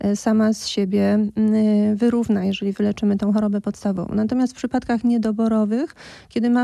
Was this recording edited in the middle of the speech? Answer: no; 0 cuts

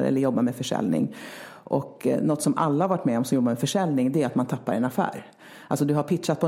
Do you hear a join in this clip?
no; 0 cuts

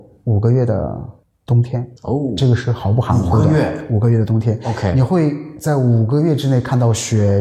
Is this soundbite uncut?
no; 2 cuts; at 1.2 s, 2.0 s

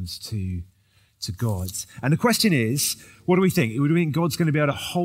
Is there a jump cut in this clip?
no; 0 cuts

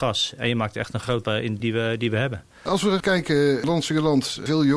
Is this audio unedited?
no; 3 cuts; at 1.2 s, 1.6 s, 3.0 s

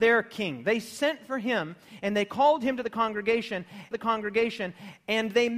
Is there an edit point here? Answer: yes; 1 cut; at 3.9 s

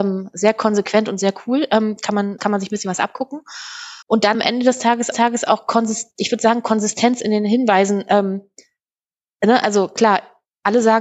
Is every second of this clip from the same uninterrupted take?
no; 4 cuts; at 2.4 s, 4.0 s, 4.3 s, 5.1 s

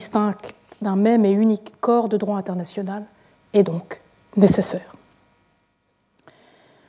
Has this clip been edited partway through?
no; 0 cuts

